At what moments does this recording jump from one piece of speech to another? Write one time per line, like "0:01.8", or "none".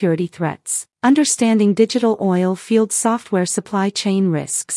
0:00.9